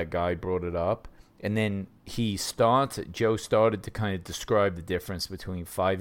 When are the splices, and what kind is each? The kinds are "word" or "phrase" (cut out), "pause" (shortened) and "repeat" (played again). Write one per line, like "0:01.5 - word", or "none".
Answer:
0:01.2 - pause